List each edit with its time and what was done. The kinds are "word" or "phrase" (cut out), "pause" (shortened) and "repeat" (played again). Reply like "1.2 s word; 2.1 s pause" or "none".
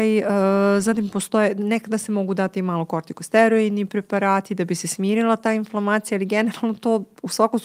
none